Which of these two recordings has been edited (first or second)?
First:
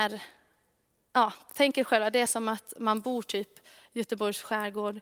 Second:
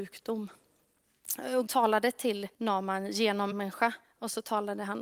second